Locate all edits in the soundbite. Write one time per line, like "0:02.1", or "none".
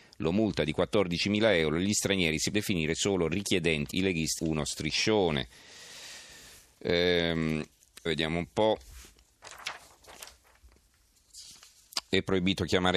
0:02.5
0:03.9
0:04.4
0:08.1